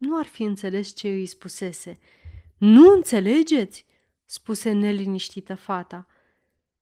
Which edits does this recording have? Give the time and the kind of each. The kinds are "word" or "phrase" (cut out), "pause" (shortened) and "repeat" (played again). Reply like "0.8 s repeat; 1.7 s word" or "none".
none